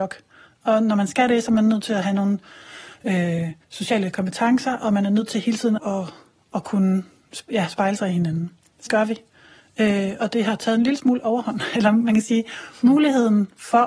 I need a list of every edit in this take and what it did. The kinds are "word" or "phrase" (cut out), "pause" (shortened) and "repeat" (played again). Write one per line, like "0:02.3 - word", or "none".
0:03.6 - pause
0:05.8 - word
0:08.9 - word

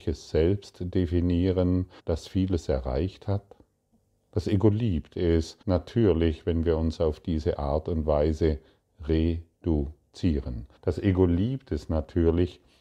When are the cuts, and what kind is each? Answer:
0:02.0 - pause
0:03.9 - pause
0:05.6 - pause
0:10.8 - pause

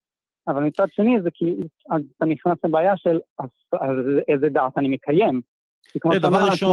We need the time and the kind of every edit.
none

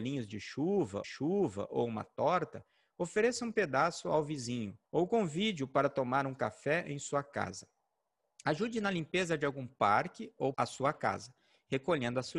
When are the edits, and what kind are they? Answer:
0:01.0 - repeat
0:04.8 - pause
0:10.5 - phrase

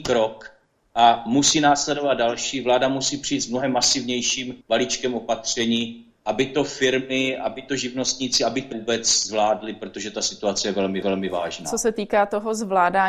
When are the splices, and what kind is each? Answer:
0:04.6 - pause
0:08.7 - word
0:11.0 - repeat

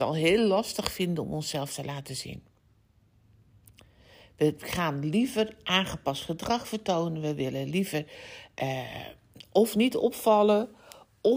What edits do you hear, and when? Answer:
none

